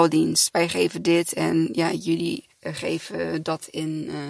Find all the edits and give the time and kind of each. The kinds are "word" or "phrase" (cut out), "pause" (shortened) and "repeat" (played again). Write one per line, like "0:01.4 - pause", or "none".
0:02.5 - pause